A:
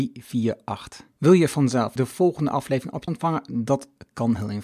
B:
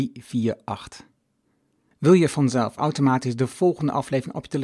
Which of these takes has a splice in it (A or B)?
A